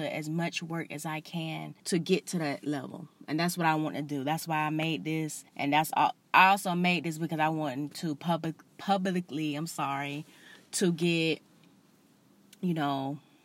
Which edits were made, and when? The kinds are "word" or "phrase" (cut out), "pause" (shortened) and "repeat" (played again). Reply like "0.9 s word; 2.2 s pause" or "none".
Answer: 1.8 s pause; 5.5 s pause